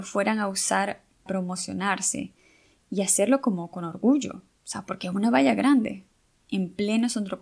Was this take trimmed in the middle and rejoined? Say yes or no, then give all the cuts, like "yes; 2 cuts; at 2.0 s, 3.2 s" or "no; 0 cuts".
yes; 1 cut; at 1.3 s